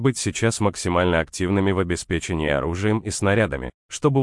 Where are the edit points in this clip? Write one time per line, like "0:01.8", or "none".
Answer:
none